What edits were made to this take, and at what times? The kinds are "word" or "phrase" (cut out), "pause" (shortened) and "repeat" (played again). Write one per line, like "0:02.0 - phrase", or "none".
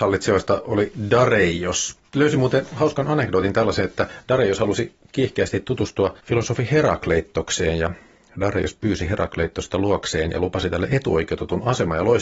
0:02.1 - pause
0:06.2 - pause